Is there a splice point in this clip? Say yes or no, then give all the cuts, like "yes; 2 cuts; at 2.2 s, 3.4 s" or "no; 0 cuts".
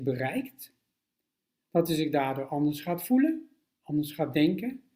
no; 0 cuts